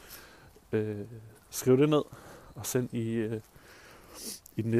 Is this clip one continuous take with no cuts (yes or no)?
yes